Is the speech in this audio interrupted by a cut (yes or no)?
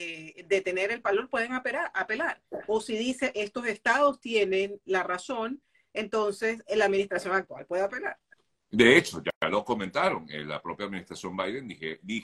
no